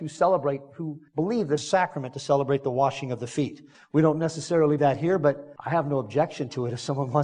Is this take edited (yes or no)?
yes